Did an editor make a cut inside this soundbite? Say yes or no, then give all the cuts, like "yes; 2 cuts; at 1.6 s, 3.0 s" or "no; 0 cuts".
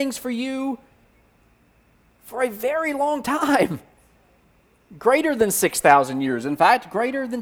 no; 0 cuts